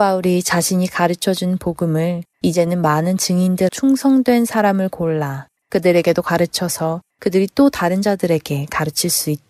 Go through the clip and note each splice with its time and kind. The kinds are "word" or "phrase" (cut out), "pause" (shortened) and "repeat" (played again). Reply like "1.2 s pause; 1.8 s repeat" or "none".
2.3 s pause; 3.7 s word; 7.1 s pause